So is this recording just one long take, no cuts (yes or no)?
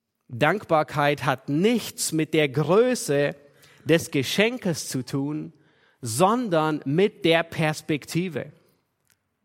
yes